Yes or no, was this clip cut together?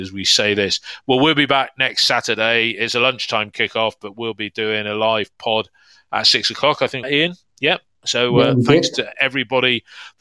yes